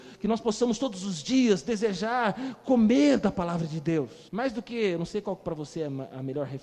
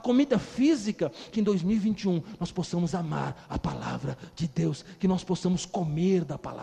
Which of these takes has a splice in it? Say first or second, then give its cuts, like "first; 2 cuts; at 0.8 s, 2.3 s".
first; 1 cut; at 4.3 s